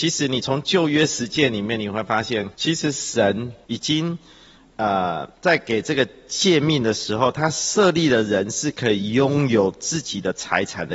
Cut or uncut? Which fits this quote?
cut